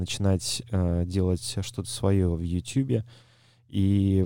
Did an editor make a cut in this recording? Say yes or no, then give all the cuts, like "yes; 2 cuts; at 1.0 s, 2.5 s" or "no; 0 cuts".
no; 0 cuts